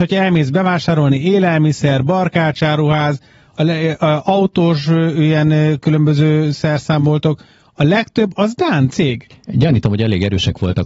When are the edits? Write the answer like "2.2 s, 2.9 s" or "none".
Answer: none